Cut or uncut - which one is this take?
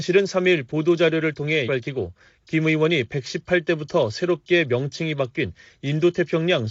cut